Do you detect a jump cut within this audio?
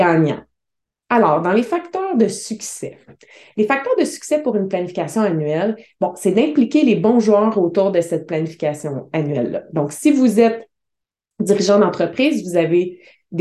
no; 0 cuts

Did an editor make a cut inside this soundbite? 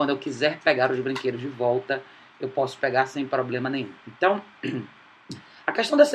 no; 0 cuts

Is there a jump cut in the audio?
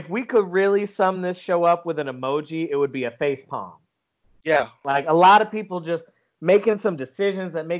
no; 0 cuts

